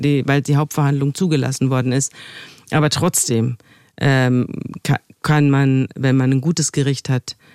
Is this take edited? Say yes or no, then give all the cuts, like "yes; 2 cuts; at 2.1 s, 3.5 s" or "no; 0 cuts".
no; 0 cuts